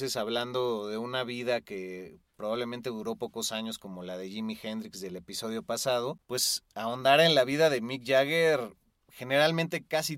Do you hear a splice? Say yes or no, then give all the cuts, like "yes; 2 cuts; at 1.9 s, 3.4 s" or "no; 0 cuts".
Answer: no; 0 cuts